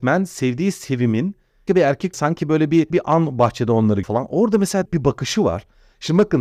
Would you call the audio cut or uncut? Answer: cut